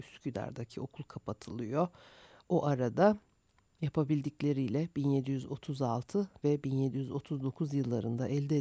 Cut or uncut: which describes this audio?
uncut